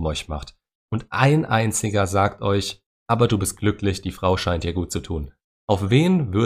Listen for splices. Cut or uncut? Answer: uncut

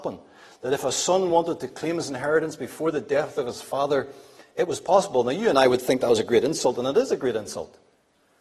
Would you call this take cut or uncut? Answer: uncut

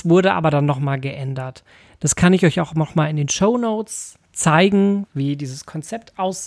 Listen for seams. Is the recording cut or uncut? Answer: uncut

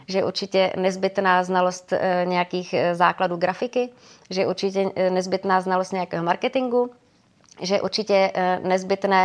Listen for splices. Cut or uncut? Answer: uncut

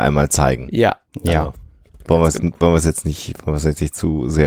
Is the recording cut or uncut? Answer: uncut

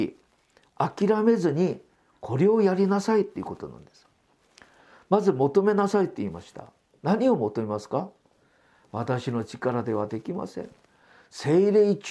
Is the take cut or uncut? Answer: uncut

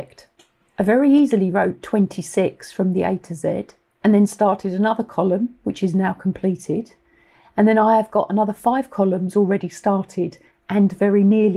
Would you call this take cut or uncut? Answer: uncut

